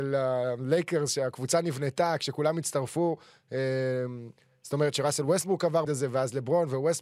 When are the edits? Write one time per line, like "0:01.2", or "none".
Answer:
0:05.9